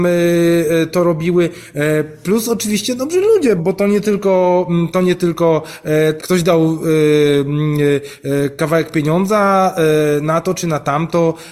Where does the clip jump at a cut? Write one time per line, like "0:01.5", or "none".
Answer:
0:03.6
0:06.2

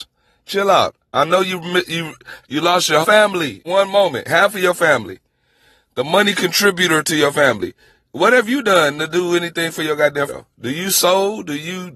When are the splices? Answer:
0:02.4
0:03.0
0:03.6
0:10.3

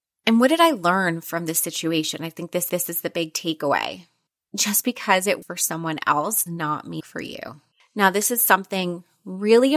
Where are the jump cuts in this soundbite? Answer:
0:02.7
0:04.3
0:05.4
0:06.5
0:07.0
0:07.7

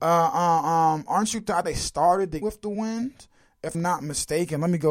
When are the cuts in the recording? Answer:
0:01.6
0:02.4
0:03.7

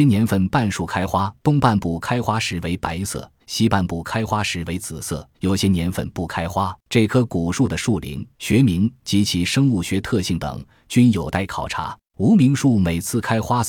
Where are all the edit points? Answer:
0:01.4
0:03.4
0:05.3
0:06.8
0:08.3
0:12.1

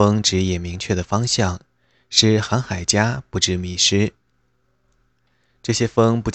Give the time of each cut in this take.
none

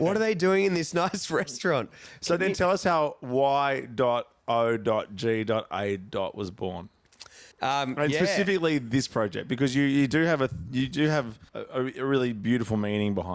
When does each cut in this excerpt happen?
0:07.5
0:11.5

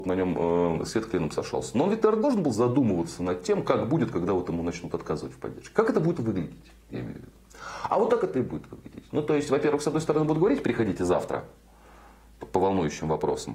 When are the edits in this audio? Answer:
none

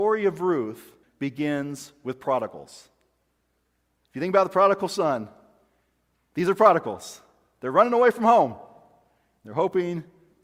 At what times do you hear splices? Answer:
0:01.0

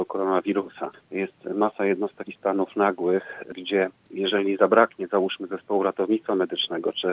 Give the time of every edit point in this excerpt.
0:02.3

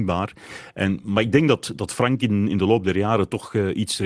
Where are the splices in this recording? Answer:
none

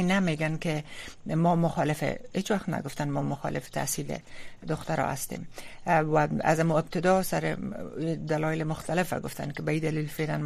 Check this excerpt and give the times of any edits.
none

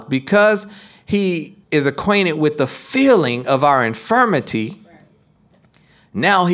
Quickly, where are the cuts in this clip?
0:01.6

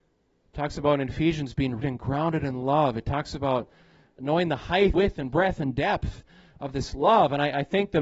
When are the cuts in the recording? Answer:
0:01.8
0:04.2
0:04.9

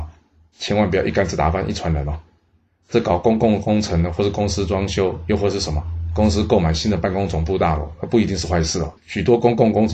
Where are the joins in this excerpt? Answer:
0:09.0

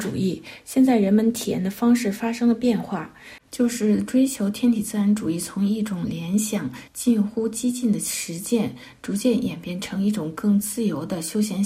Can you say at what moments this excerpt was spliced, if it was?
0:06.9

